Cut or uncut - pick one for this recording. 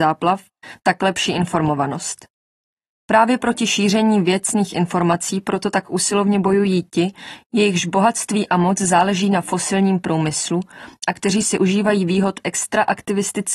uncut